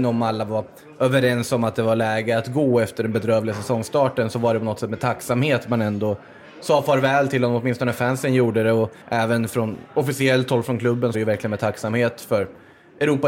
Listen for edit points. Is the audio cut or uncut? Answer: cut